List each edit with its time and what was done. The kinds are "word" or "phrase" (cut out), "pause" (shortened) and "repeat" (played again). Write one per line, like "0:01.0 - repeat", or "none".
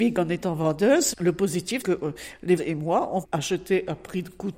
0:01.1 - word
0:01.8 - word
0:02.6 - word
0:03.2 - word